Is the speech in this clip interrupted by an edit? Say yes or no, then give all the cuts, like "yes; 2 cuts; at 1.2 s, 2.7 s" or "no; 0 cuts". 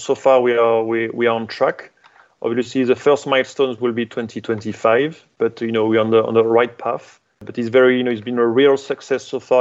no; 0 cuts